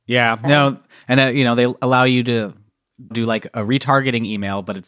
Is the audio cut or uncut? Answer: cut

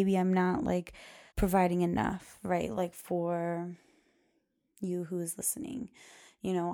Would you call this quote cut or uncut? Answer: cut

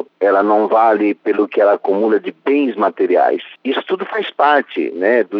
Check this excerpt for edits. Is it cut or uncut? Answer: uncut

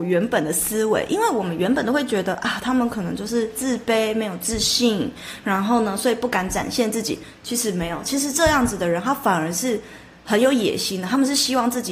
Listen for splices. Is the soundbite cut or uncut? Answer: uncut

